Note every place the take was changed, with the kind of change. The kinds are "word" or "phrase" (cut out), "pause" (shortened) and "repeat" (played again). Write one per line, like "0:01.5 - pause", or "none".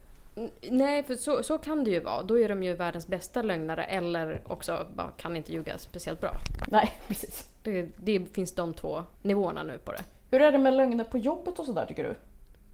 0:09.1 - pause